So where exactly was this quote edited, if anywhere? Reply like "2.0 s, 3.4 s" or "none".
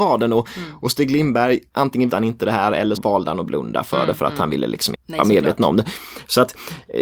2.1 s, 3.0 s, 4.9 s